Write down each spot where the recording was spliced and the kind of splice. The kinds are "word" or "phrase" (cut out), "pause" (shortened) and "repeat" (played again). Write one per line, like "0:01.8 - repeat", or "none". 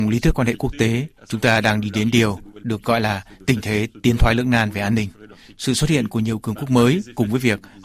none